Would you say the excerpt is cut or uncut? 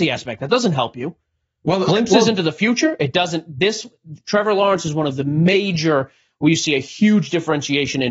uncut